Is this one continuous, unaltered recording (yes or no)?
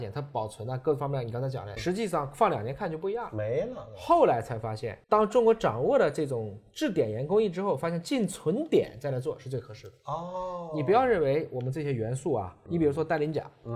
no